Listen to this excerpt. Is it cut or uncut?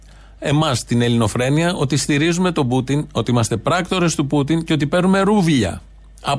uncut